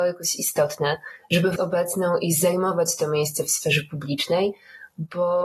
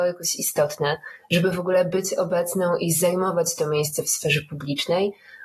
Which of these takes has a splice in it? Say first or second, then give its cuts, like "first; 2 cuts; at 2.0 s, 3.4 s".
first; 1 cut; at 1.6 s